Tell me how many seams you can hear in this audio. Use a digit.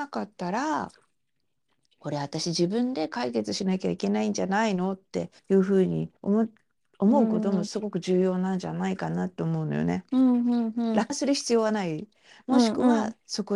3